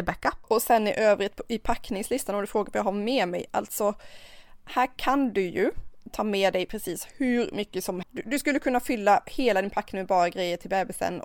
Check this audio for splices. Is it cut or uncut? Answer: cut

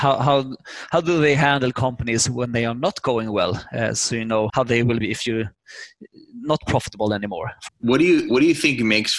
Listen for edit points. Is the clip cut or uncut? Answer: cut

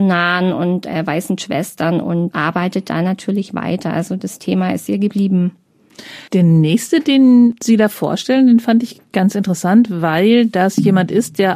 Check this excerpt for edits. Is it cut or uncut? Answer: cut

